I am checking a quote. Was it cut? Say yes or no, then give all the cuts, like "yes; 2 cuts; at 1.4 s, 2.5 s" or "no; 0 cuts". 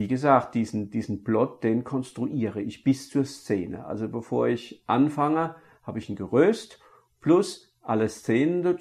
no; 0 cuts